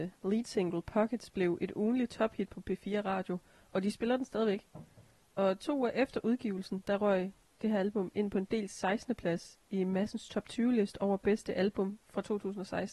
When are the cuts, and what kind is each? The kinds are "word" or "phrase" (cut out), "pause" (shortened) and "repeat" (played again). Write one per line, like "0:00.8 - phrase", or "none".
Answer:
none